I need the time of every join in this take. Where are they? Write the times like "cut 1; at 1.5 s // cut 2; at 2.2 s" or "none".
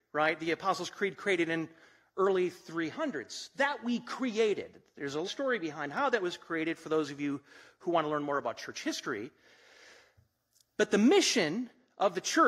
cut 1; at 5.2 s